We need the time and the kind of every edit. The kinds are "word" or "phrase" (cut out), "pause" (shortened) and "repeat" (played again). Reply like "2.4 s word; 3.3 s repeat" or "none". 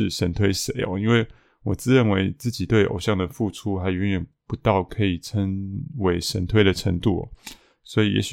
none

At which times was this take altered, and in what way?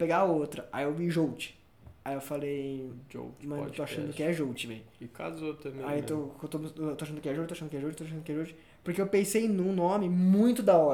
none

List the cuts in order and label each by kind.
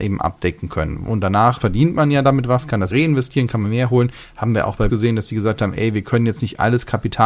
1.6 s word; 2.9 s word; 4.9 s word

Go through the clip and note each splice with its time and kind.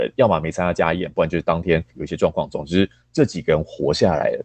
1.9 s pause

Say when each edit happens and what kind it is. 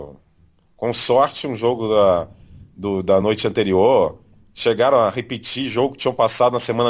none

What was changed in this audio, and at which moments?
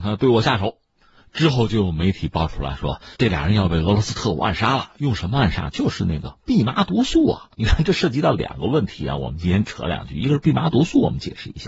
3.1 s pause; 7.5 s pause

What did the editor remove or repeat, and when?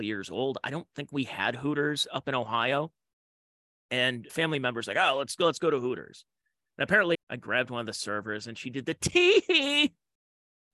4.3 s word; 7.1 s word

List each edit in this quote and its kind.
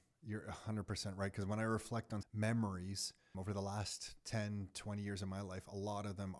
2.2 s phrase; 3.3 s word

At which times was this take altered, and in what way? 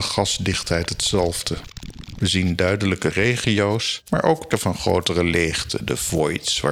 3.1 s word; 4.5 s word

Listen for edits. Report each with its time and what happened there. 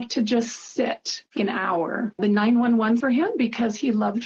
1.4 s word; 3.0 s phrase

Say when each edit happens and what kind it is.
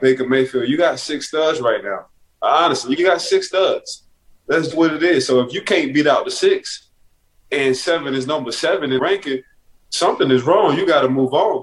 3.0 s word; 4.7 s word; 9.0 s word

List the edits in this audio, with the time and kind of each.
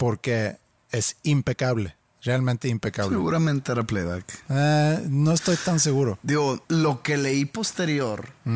6.6 s pause

